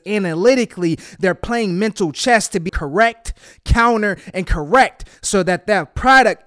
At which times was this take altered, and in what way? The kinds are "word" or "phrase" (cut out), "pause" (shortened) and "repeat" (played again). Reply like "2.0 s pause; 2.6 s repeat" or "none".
2.7 s phrase